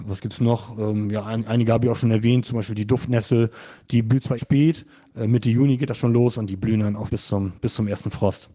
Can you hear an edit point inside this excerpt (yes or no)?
yes